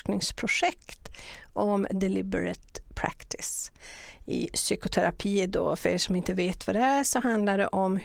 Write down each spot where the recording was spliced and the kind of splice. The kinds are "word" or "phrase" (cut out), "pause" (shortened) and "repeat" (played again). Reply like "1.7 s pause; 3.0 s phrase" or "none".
2.8 s pause